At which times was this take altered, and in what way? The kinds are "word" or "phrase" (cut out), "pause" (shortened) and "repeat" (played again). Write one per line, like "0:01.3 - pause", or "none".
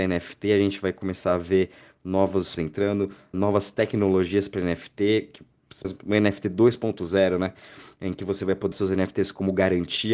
0:02.6 - word
0:03.3 - word
0:05.8 - word
0:08.7 - word